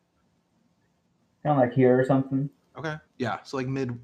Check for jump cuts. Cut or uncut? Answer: cut